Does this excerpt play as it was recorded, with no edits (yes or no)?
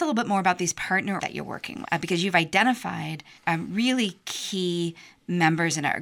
no